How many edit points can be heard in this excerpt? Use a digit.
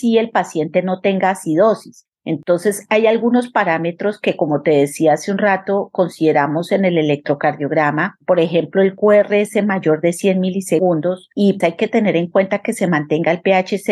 1